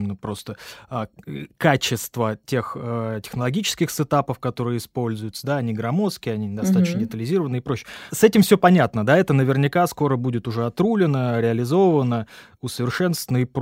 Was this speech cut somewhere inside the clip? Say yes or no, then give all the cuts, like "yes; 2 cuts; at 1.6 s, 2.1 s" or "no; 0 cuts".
no; 0 cuts